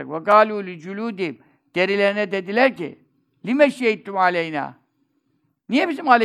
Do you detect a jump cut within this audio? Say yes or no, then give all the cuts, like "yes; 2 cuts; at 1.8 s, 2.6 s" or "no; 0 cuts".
no; 0 cuts